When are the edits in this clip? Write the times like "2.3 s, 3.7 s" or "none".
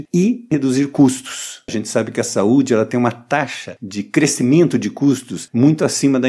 none